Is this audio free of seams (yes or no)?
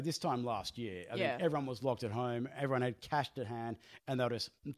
yes